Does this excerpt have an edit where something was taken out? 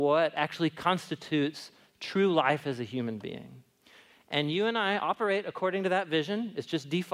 no; 0 cuts

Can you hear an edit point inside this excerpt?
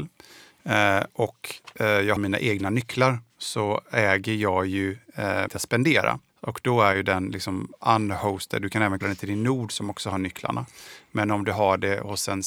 yes; 5 cuts; at 2.2 s, 3.3 s, 5.5 s, 6.3 s, 9.0 s

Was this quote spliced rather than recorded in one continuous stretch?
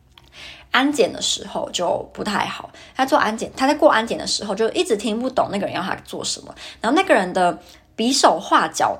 no; 0 cuts

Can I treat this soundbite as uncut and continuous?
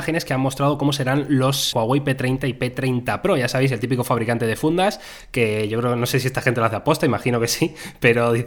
no; 1 cut; at 1.7 s

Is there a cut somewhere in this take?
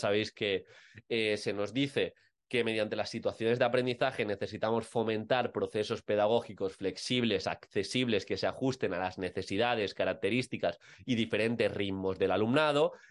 no; 0 cuts

